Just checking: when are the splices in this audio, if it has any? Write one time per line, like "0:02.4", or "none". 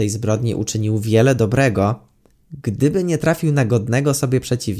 none